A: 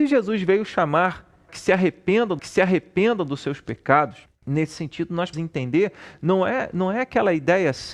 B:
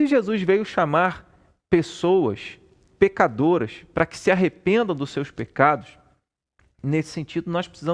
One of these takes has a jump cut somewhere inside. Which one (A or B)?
A